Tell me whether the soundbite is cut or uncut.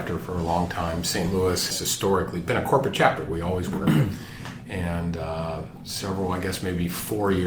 cut